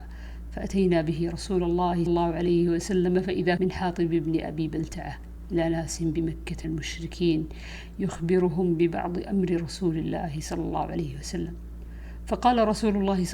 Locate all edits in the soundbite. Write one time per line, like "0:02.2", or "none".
0:02.1
0:03.6
0:06.6